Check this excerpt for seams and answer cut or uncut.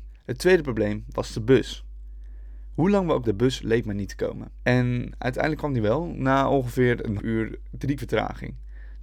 cut